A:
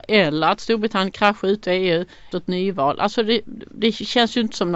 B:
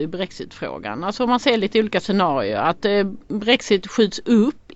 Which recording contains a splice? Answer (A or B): A